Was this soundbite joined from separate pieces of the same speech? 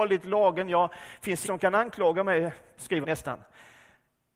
yes; 2 cuts; at 1.4 s, 3.0 s

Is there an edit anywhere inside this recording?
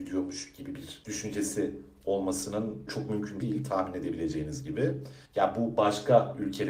yes; 3 cuts; at 2.9 s, 3.4 s, 5.2 s

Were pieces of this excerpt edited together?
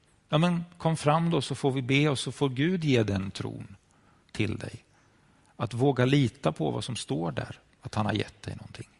no; 0 cuts

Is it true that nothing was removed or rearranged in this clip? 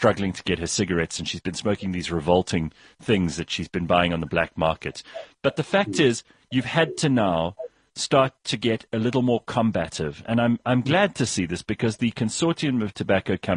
yes; 0 cuts

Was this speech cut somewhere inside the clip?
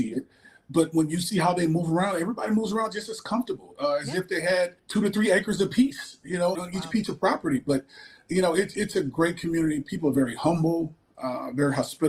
yes; 2 cuts; at 4.8 s, 6.5 s

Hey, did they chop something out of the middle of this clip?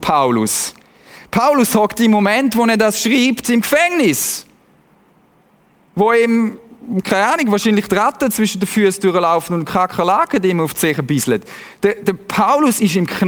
no; 0 cuts

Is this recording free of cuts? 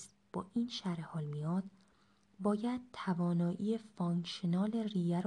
yes; 0 cuts

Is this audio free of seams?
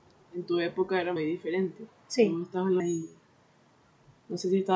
no; 2 cuts; at 1.2 s, 2.8 s

